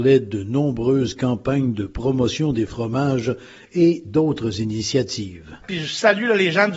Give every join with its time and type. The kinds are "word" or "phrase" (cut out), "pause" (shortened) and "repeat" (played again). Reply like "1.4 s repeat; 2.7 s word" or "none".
none